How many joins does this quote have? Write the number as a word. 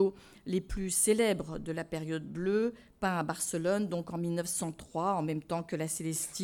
zero